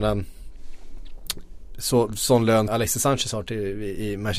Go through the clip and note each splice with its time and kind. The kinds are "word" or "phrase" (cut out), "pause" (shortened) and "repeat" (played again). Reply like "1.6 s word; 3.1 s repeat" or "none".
2.7 s word